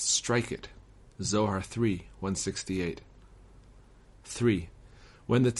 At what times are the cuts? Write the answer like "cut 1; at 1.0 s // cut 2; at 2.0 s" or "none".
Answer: none